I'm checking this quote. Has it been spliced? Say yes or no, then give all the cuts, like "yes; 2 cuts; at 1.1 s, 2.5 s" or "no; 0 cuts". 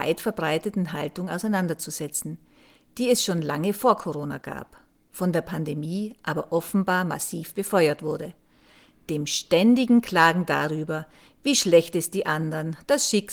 no; 0 cuts